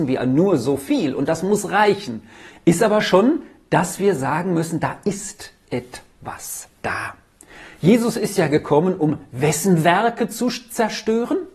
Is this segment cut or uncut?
uncut